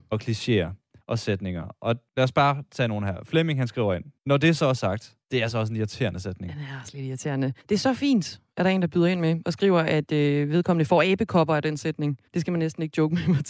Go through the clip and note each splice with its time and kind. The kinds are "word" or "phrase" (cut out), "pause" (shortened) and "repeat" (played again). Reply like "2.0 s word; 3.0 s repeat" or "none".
1.0 s pause; 2.1 s pause; 4.2 s pause; 5.2 s pause; 7.6 s pause; 12.3 s pause